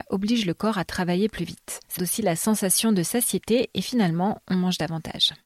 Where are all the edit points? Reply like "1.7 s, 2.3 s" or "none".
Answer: 2.0 s